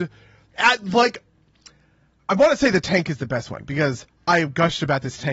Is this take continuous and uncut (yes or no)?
yes